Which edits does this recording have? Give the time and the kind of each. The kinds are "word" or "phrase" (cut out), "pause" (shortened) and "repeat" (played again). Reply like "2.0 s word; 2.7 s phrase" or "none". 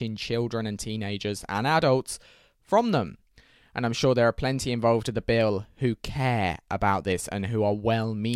none

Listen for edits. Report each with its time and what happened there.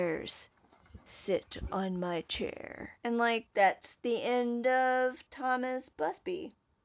3.0 s pause; 3.5 s pause

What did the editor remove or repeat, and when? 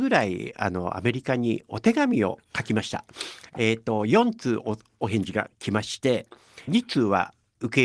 2.4 s pause; 6.7 s phrase

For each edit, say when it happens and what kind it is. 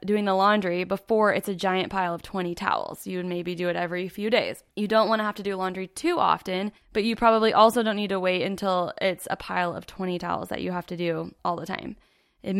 4.7 s pause; 6.8 s pause; 11.4 s pause

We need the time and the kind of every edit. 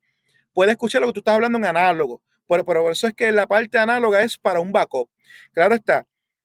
none

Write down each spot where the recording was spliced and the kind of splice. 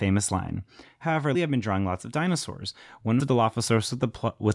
1.3 s word; 3.2 s word

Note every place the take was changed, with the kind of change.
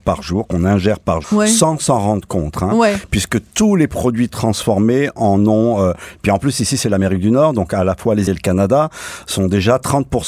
1.2 s word; 8.3 s word

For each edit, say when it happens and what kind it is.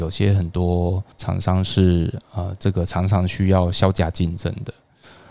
1.1 s pause

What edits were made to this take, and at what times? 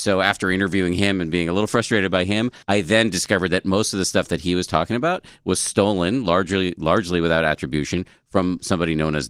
2.6 s pause

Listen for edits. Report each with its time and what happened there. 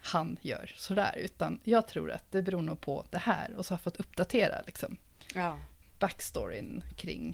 none

